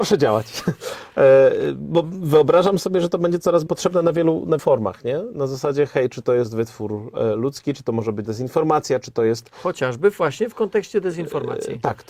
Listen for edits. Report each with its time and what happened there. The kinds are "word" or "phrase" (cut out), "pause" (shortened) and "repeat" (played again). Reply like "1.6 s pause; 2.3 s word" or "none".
3.7 s word; 4.6 s word; 8.2 s word